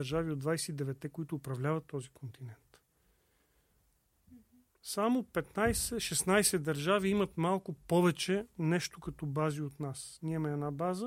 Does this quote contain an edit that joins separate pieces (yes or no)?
no